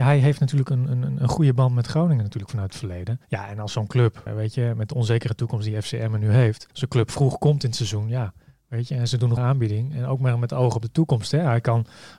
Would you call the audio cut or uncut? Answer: cut